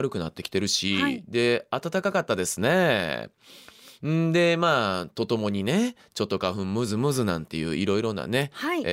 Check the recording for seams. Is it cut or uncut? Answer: uncut